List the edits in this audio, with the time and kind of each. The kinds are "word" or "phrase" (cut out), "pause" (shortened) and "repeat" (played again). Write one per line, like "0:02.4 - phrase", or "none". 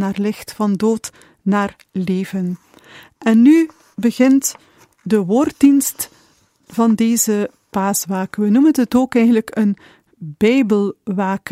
none